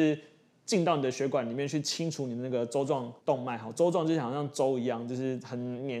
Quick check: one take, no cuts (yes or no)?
no